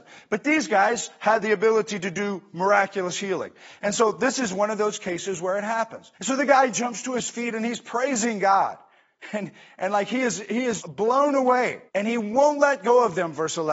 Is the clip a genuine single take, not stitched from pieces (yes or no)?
no